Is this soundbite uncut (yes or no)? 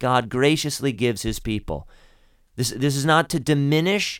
yes